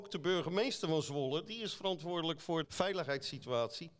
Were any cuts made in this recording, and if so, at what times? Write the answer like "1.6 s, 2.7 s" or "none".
2.6 s